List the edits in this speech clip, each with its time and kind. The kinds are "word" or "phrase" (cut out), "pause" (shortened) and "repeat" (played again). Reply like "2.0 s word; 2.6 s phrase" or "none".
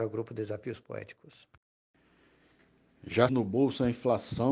3.3 s word